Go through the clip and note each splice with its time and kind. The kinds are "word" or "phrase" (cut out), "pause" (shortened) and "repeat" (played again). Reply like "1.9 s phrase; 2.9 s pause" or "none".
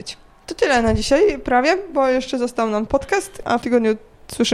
2.9 s word; 3.6 s word